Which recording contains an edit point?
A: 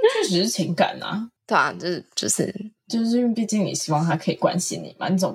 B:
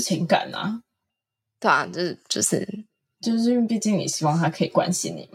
A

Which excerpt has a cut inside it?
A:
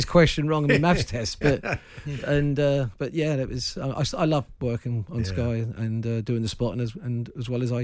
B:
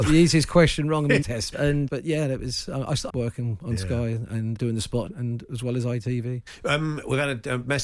B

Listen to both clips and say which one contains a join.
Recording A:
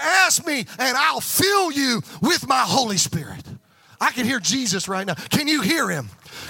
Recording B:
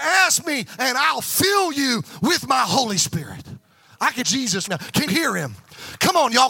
B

